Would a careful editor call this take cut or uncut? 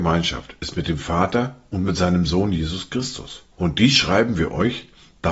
cut